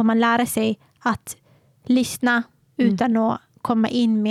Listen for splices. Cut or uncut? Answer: uncut